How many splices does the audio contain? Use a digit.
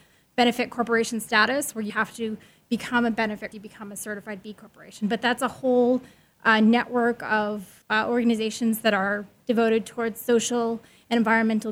3